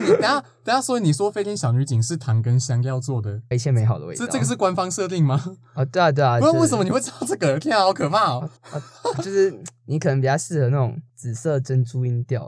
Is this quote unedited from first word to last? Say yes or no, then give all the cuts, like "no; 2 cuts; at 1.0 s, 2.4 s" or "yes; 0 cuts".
no; 4 cuts; at 3.5 s, 8.6 s, 9.2 s, 11.1 s